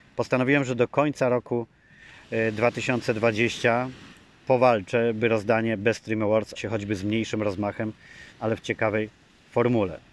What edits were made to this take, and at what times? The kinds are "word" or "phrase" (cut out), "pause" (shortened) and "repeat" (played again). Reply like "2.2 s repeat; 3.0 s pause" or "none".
6.6 s word; 8.3 s pause